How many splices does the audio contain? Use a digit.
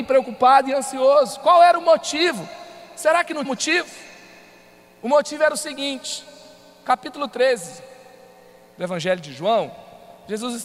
1